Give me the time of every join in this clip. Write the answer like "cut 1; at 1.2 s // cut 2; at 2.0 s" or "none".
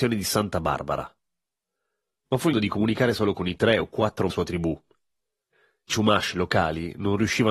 cut 1; at 2.5 s // cut 2; at 4.3 s // cut 3; at 5.9 s

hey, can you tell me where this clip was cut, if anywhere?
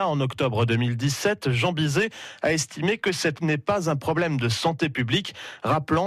cut 1; at 3.4 s

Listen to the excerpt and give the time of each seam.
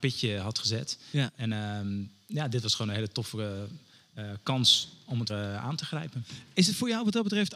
cut 1; at 5.3 s

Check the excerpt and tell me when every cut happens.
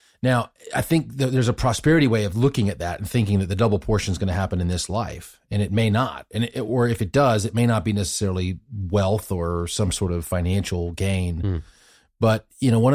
none

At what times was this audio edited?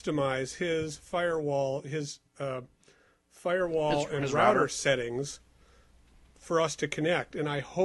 none

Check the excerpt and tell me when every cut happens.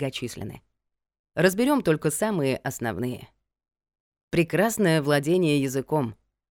none

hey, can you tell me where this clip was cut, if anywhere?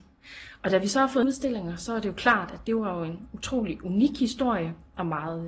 cut 1; at 1.2 s

